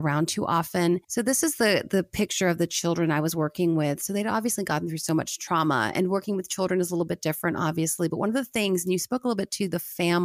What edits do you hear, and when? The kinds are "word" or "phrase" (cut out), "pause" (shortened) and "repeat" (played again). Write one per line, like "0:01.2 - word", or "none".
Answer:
0:01.0 - pause